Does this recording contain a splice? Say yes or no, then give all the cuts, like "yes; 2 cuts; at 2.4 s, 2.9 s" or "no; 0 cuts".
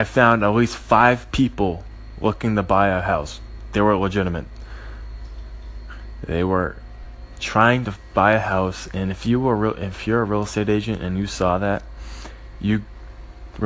no; 0 cuts